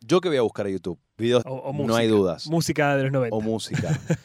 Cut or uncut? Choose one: cut